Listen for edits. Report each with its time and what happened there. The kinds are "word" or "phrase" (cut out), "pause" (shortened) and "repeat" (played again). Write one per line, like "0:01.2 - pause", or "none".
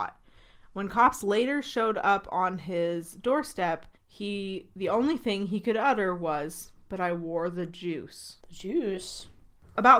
0:04.0 - pause
0:08.4 - pause